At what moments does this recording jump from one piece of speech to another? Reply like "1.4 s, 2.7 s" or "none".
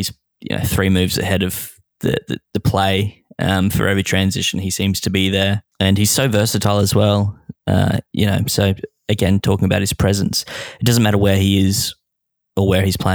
none